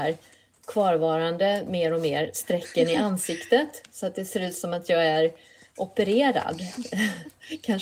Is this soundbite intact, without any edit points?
yes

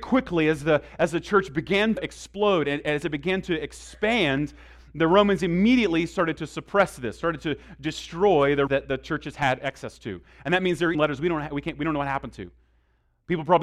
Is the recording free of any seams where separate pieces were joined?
no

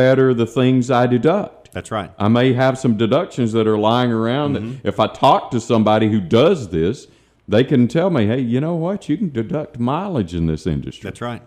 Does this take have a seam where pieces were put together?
no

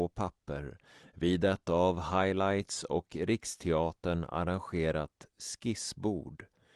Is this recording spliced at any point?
no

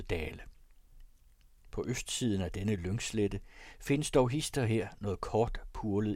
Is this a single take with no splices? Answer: yes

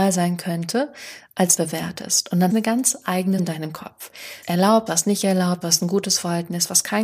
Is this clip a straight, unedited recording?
no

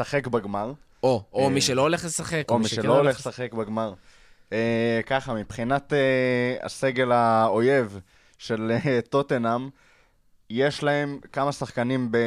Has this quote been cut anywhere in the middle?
no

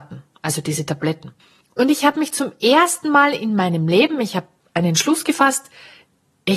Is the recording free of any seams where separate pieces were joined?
yes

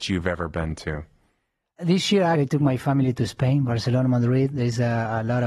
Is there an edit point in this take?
yes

